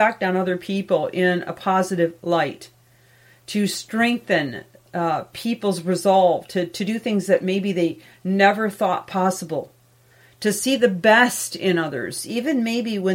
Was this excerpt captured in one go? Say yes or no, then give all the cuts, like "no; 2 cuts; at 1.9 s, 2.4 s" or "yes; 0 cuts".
yes; 0 cuts